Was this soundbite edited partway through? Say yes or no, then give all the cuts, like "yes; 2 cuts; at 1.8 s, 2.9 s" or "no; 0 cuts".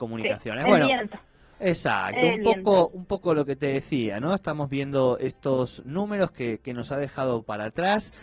no; 0 cuts